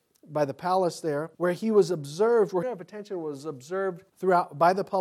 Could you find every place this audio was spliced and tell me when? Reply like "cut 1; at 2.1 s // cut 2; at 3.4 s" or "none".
cut 1; at 1.3 s // cut 2; at 2.6 s // cut 3; at 4.1 s